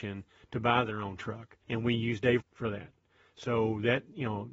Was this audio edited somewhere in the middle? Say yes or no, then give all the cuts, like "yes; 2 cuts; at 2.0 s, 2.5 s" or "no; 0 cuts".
yes; 2 cuts; at 1.6 s, 2.4 s